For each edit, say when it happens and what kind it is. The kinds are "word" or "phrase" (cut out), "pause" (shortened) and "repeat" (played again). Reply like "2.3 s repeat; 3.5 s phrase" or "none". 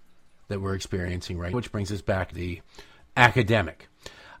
1.5 s word; 2.3 s word